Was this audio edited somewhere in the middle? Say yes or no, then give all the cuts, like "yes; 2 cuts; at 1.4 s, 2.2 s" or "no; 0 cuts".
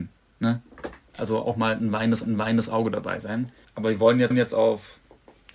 yes; 4 cuts; at 1.2 s, 2.2 s, 3.6 s, 4.3 s